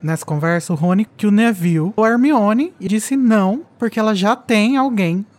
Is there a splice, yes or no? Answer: yes